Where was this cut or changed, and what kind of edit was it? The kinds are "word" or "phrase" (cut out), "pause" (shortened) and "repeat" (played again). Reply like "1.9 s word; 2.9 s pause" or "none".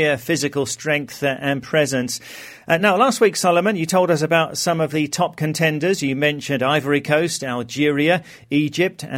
none

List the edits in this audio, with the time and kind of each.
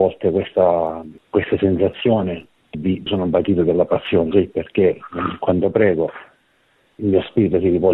1.2 s pause; 2.7 s word; 3.1 s word; 4.3 s word; 7.0 s word

